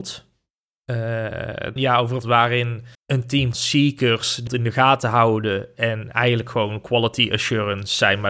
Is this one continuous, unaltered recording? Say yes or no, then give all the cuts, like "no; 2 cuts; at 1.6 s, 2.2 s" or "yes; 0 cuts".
no; 5 cuts; at 1.8 s, 2.2 s, 2.9 s, 3.5 s, 4.5 s